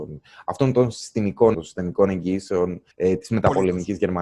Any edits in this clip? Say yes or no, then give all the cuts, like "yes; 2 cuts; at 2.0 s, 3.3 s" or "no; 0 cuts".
yes; 2 cuts; at 1.5 s, 2.9 s